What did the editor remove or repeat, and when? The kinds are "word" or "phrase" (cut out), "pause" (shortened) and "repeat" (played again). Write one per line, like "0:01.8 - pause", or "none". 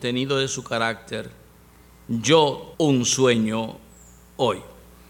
0:02.7 - word